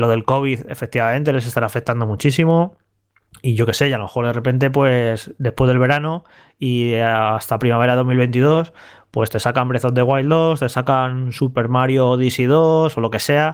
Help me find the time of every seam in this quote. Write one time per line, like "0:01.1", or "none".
none